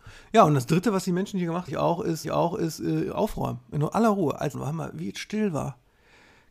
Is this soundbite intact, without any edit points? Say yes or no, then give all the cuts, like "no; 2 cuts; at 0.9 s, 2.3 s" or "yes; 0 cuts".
no; 3 cuts; at 1.7 s, 2.2 s, 4.5 s